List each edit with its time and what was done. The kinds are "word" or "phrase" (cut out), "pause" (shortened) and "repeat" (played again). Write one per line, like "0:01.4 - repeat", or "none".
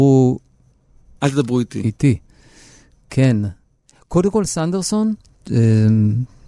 none